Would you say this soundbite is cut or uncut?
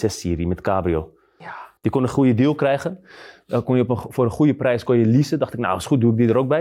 uncut